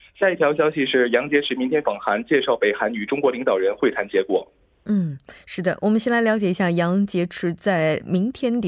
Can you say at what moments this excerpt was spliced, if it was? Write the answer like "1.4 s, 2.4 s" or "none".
5.4 s